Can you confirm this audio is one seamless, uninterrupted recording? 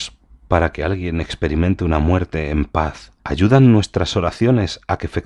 no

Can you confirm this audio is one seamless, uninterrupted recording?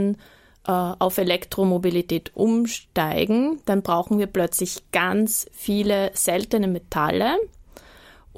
yes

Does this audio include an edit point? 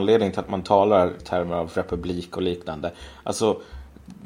yes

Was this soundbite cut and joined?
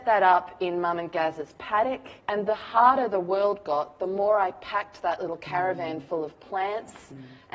yes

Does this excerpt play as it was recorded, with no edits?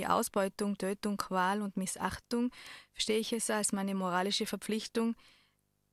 yes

